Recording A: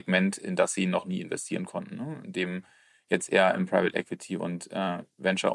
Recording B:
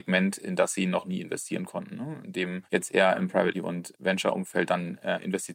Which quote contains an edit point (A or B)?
B